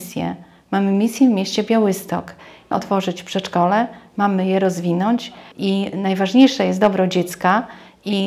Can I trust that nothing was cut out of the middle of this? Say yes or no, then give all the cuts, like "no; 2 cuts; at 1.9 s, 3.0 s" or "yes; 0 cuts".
no; 2 cuts; at 2.7 s, 5.5 s